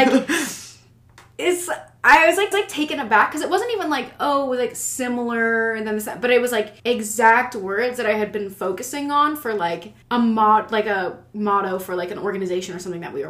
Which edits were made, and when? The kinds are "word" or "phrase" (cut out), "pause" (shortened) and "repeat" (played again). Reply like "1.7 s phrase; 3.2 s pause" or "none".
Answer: 2.5 s repeat; 6.8 s pause; 10.0 s pause